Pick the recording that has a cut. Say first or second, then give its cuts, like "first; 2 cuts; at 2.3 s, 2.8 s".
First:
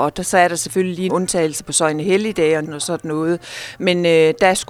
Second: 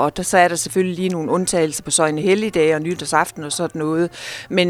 first; 2 cuts; at 1.1 s, 2.6 s